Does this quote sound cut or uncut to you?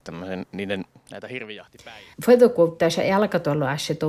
cut